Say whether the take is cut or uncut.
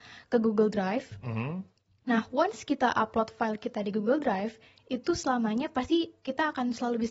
uncut